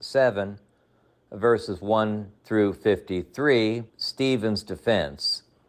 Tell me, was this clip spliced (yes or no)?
yes